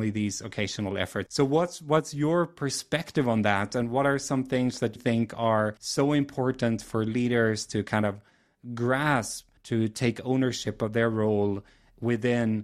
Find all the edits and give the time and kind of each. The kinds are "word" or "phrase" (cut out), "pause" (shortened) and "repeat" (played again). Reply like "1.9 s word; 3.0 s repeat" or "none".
1.3 s word; 5.0 s word; 5.8 s pause; 9.6 s pause